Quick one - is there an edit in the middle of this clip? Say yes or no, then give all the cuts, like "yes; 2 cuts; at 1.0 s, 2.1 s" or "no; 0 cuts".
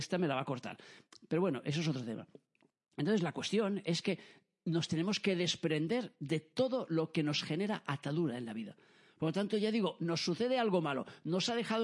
no; 0 cuts